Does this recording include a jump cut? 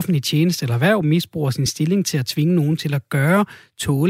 no; 0 cuts

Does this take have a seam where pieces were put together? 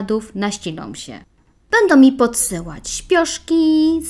no; 0 cuts

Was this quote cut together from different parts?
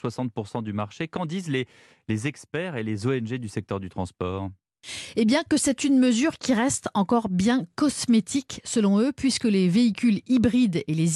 no; 0 cuts

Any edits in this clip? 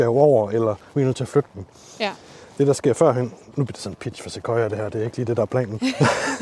no; 0 cuts

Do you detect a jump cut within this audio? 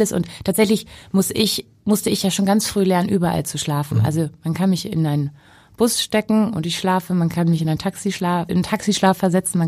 yes; 1 cut; at 8.5 s

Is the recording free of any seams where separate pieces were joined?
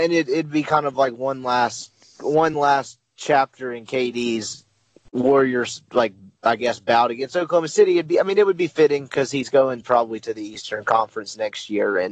yes; 0 cuts

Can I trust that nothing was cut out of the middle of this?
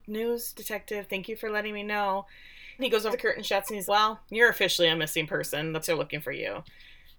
no; 4 cuts; at 2.8 s, 3.1 s, 3.9 s, 5.8 s

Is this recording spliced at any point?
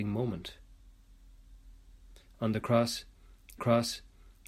yes; 1 cut; at 3.6 s

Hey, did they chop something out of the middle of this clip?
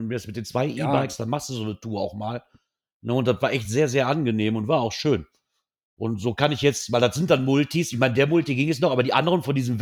no; 0 cuts

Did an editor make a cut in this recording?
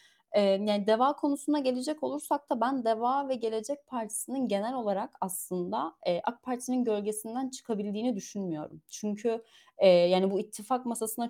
no; 0 cuts

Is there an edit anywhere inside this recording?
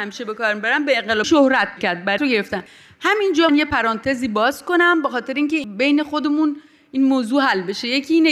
yes; 4 cuts; at 1.2 s, 1.8 s, 2.2 s, 3.5 s

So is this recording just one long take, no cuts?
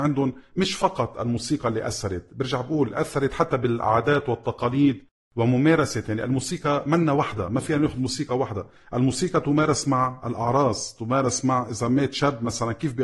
yes; 0 cuts

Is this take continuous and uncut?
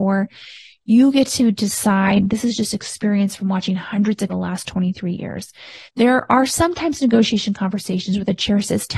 no; 2 cuts; at 4.3 s, 5.9 s

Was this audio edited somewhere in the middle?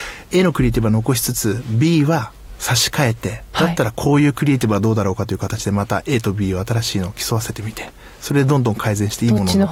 no; 0 cuts

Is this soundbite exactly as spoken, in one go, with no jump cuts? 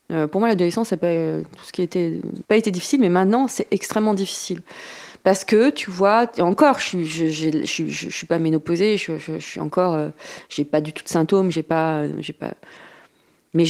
no; 1 cut; at 2.4 s

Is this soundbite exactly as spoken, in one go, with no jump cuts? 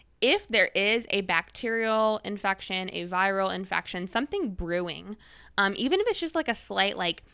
yes; 0 cuts

